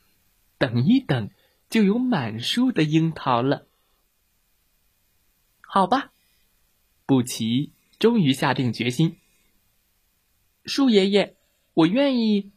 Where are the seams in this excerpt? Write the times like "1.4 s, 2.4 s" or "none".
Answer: none